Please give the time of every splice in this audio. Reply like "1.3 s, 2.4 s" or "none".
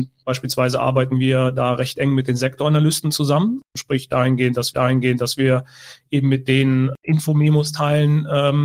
4.7 s